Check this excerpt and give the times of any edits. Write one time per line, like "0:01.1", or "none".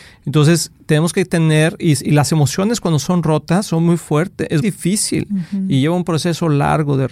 0:04.6